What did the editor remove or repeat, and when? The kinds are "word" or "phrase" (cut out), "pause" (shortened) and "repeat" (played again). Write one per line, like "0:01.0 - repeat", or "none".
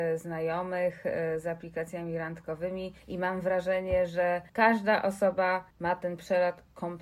0:03.0 - pause
0:04.5 - pause
0:05.7 - pause